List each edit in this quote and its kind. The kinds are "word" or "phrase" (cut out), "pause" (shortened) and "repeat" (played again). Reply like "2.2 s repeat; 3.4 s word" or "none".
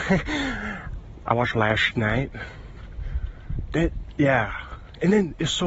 1.5 s word